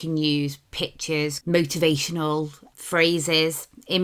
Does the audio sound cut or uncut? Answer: cut